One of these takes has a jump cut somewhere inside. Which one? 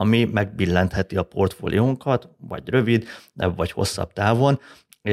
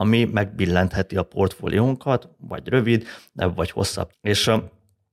second; 1 cut; at 4.1 s

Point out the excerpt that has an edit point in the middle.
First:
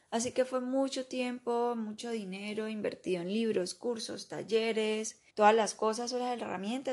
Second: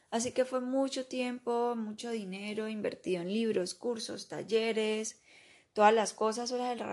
first; 1 cut; at 5.3 s

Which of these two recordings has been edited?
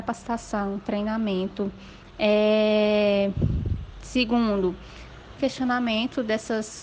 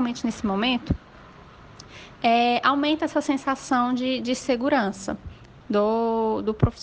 first; 1 cut; at 5.4 s

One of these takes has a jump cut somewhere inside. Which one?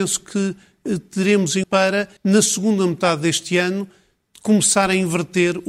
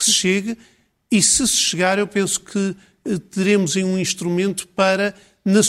first; 2 cuts; at 1.6 s, 2.2 s

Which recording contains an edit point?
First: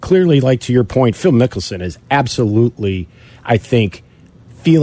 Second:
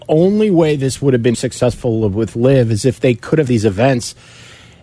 second; 2 cuts; at 1.3 s, 3.5 s

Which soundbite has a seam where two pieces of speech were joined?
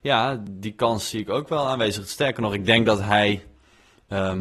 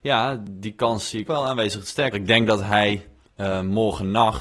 second; 3 cuts; at 1.3 s, 2.1 s, 3.2 s

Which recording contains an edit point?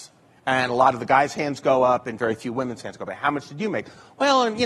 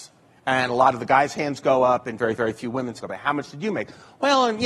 second; 2 cuts; at 2.4 s, 3.0 s

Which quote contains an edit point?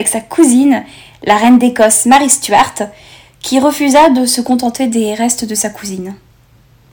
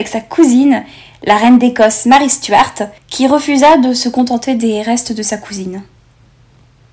second; 1 cut; at 3.0 s

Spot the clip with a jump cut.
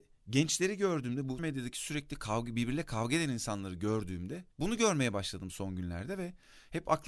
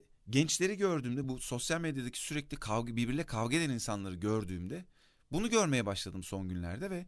first; 2 cuts; at 1.4 s, 4.5 s

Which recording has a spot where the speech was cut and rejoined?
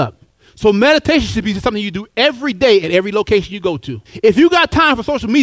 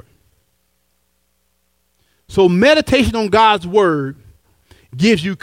first; 1 cut; at 4.1 s

